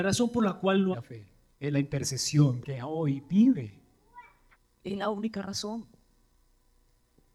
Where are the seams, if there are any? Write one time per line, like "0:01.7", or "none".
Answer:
0:00.9
0:01.5
0:02.6
0:04.5

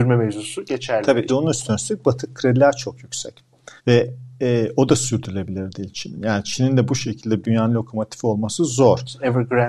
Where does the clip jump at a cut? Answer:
0:01.3
0:03.8
0:07.4

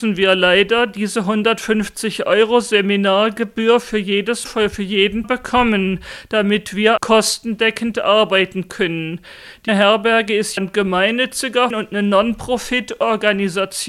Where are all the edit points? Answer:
0:04.5
0:05.2
0:07.0
0:09.7
0:10.6
0:11.7

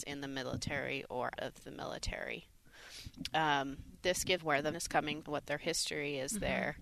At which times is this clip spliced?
0:01.4
0:04.4
0:04.7
0:05.2

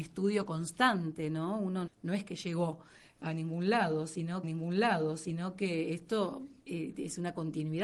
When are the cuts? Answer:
0:01.9
0:04.4
0:06.6

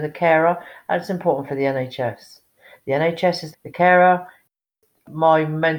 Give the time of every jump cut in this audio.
0:03.5

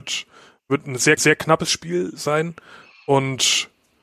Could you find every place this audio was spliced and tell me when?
0:01.2

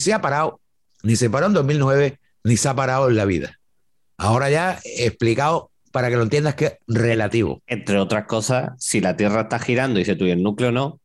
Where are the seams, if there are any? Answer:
none

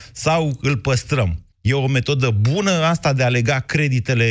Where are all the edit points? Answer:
0:01.5

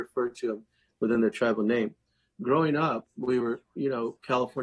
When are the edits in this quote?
none

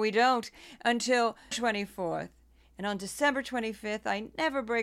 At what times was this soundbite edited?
0:01.5

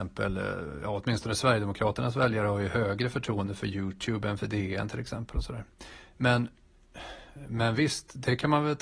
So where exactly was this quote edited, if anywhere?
none

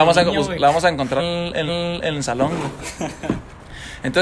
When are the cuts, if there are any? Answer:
0:01.2
0:01.7

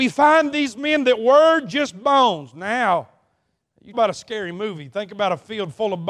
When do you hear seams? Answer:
0:03.9

